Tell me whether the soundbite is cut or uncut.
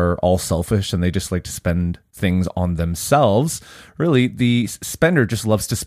uncut